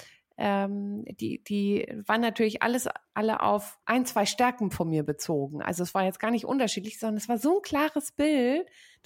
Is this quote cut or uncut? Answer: cut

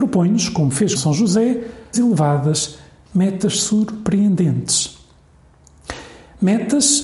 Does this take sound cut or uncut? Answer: cut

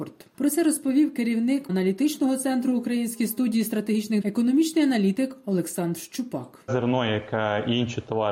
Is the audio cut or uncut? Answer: cut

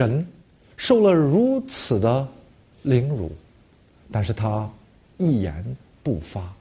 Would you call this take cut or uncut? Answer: uncut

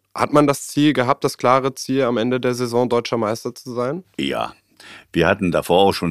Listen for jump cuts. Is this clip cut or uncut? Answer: uncut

